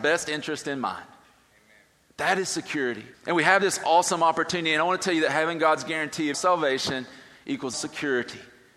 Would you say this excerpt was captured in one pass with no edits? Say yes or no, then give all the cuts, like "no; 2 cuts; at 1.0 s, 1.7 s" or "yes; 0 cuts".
no; 3 cuts; at 3.1 s, 6.3 s, 7.7 s